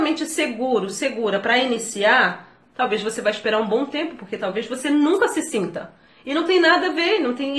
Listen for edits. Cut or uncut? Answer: uncut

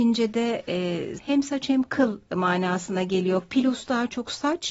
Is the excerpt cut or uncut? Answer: cut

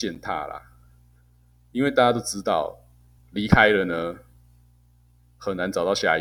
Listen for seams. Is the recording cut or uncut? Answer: cut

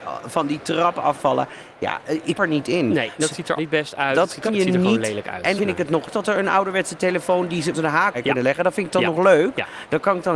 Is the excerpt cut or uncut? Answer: cut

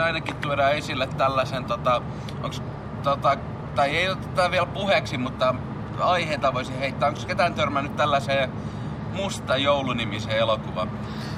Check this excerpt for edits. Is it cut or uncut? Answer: uncut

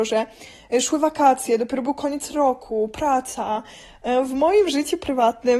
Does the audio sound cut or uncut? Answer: uncut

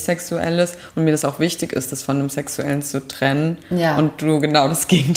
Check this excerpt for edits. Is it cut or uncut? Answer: uncut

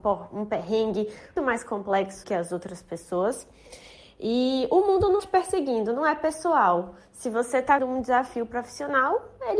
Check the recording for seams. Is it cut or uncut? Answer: cut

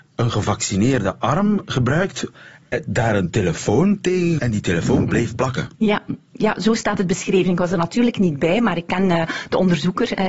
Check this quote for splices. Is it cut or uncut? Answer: cut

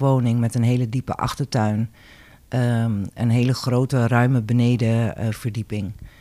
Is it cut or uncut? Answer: uncut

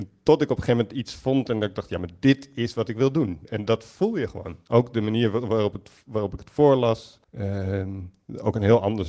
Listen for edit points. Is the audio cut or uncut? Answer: cut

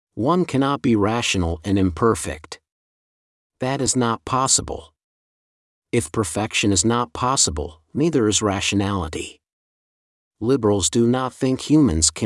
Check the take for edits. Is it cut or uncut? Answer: uncut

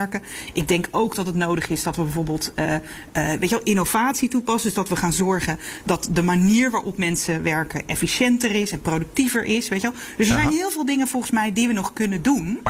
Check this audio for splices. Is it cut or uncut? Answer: uncut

